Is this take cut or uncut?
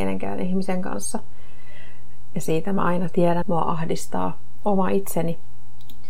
cut